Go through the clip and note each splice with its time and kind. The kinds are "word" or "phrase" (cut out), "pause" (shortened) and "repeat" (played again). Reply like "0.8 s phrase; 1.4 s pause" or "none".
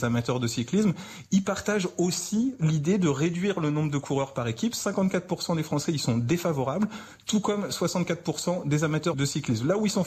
9.1 s word